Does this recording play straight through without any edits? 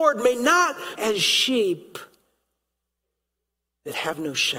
no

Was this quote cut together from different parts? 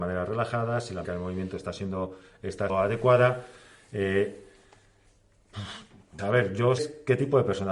yes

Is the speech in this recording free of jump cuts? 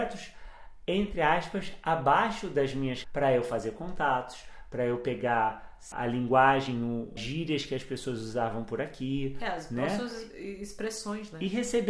no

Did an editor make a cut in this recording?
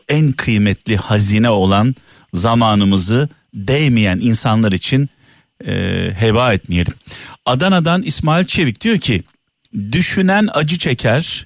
no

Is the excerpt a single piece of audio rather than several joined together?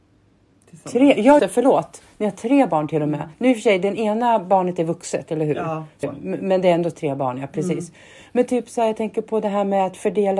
no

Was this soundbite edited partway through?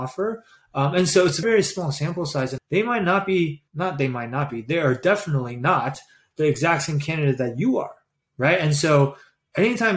yes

